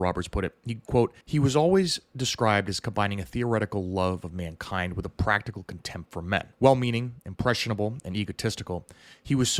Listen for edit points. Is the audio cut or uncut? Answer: cut